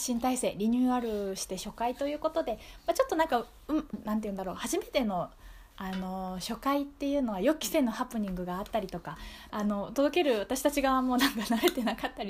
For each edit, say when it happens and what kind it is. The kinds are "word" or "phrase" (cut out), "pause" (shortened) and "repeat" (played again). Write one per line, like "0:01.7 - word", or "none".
0:03.9 - word
0:05.7 - pause
0:09.5 - word